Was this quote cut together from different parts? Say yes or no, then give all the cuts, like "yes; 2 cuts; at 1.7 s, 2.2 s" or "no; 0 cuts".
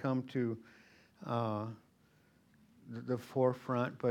no; 0 cuts